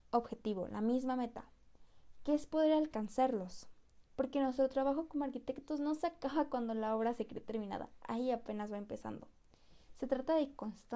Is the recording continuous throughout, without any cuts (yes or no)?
no